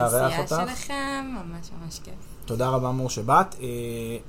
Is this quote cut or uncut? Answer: uncut